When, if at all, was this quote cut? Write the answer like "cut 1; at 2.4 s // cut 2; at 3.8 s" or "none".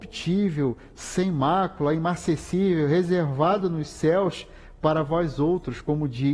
none